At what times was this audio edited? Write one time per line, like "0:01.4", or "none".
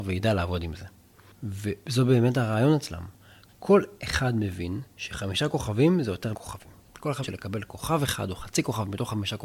0:04.9
0:06.3
0:07.2